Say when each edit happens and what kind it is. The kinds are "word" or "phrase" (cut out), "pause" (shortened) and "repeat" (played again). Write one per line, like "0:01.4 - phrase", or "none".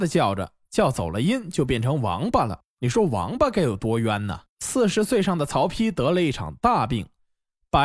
0:04.5 - pause